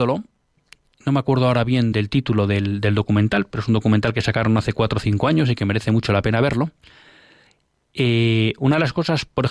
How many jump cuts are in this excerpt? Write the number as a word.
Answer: one